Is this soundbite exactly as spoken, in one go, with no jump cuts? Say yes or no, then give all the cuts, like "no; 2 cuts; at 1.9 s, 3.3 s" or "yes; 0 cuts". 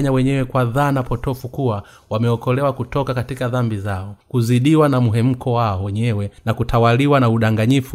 no; 2 cuts; at 4.2 s, 6.4 s